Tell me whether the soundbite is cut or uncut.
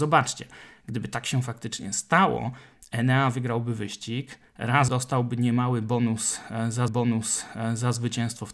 cut